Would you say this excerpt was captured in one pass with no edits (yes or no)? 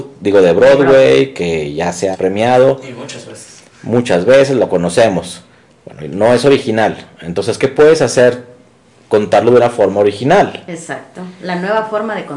no